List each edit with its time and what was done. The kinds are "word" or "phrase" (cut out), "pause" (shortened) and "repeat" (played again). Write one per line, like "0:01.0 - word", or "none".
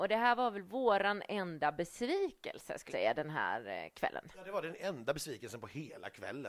0:02.9 - word